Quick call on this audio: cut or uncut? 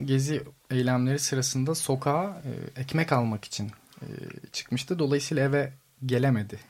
uncut